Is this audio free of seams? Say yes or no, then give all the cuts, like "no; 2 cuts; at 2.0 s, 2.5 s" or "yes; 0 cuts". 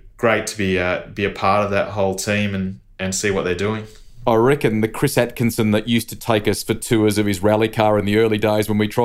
yes; 0 cuts